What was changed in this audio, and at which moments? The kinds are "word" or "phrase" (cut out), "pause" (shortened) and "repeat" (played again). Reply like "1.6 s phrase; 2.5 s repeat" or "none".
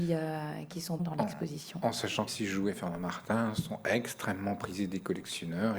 1.0 s word; 2.3 s word

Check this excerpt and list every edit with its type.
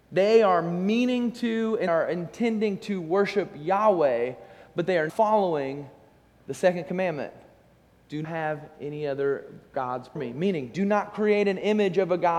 1.9 s word; 5.1 s word; 8.2 s word; 10.2 s word

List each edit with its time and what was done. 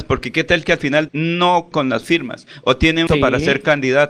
1.1 s word; 1.7 s word; 3.1 s phrase

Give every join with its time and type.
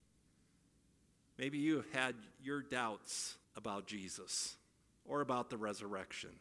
3.4 s pause; 4.8 s pause

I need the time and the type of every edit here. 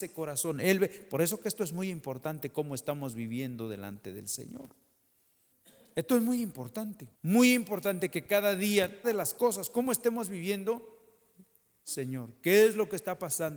5.5 s pause; 7.1 s pause; 9.0 s phrase

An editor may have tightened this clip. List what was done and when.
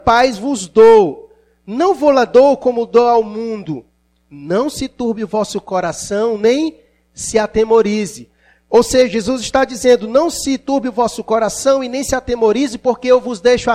none

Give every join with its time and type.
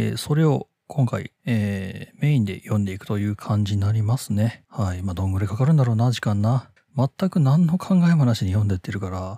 6.8 s pause

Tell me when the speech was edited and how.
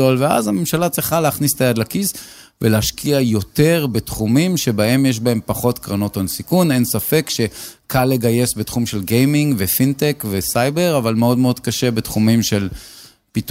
none

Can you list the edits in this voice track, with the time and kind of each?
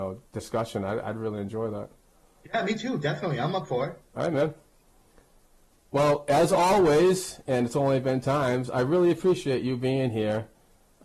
8.2 s word

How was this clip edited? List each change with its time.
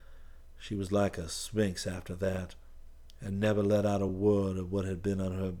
none

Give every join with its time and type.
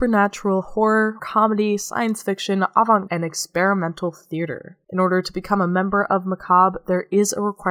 1.2 s word; 3.1 s word; 4.8 s pause

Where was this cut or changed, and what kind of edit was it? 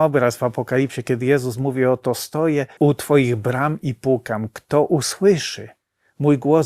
2.8 s word

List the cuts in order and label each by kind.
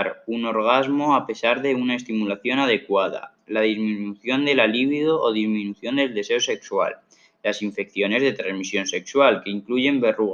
none

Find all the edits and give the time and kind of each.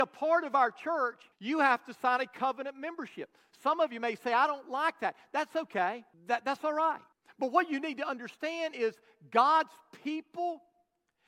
1.3 s pause; 6.1 s pause; 7.1 s pause

